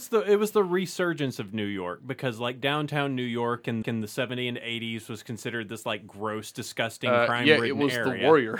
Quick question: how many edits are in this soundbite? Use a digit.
1